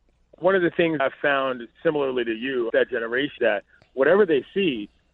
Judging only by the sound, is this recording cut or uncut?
cut